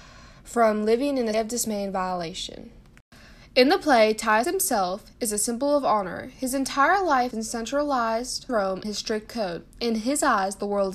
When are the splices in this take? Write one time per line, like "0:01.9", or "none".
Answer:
0:01.3
0:04.4
0:07.3
0:08.5
0:08.8
0:09.3